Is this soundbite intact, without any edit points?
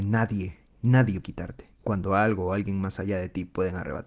no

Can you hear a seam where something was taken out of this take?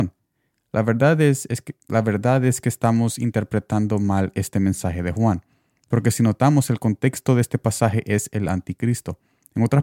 no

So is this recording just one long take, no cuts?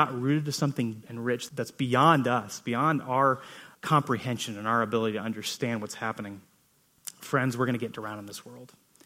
no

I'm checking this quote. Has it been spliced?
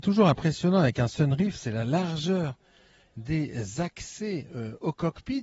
no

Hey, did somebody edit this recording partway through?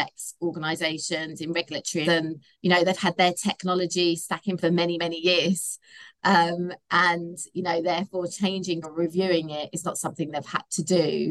yes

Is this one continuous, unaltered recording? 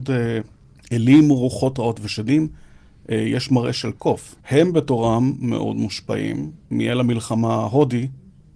no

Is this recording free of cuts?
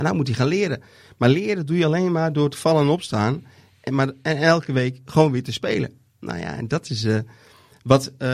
yes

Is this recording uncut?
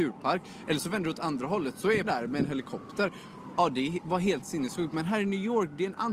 no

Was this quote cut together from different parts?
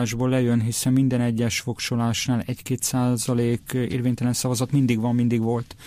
no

